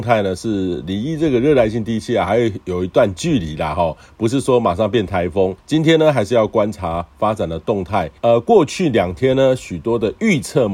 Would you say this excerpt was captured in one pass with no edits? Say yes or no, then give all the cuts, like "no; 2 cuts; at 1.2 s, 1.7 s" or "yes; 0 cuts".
no; 2 cuts; at 5.6 s, 8.2 s